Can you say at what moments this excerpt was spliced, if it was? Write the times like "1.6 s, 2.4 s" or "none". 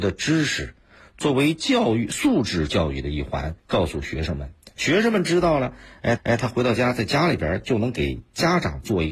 3.6 s, 6.2 s